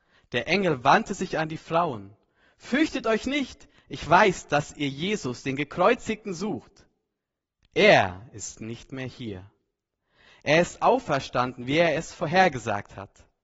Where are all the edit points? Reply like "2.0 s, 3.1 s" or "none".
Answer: none